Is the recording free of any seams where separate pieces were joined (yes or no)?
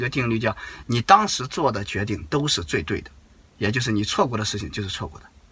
yes